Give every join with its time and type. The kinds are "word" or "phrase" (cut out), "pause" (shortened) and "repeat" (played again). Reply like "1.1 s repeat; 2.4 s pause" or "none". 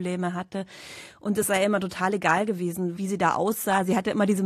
none